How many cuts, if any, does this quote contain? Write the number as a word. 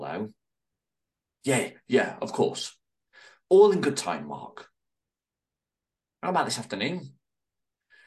zero